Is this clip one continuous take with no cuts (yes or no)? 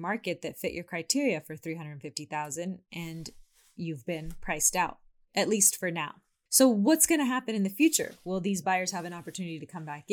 yes